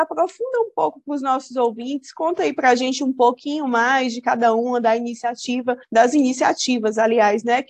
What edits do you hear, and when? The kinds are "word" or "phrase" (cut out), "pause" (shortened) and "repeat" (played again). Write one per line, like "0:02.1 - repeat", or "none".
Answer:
0:05.8 - pause